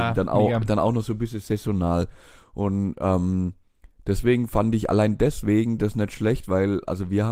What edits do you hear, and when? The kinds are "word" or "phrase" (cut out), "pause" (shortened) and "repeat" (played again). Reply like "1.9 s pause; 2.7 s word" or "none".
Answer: none